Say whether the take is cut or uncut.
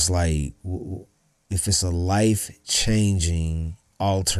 uncut